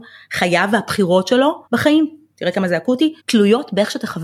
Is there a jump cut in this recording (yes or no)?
yes